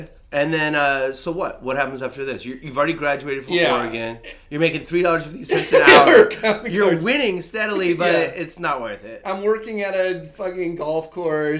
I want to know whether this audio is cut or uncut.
uncut